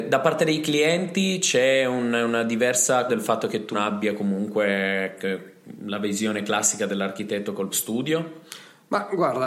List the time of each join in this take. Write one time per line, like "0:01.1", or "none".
0:03.1
0:03.7
0:07.7